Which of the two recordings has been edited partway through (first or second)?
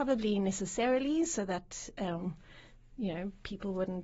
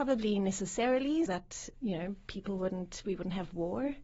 second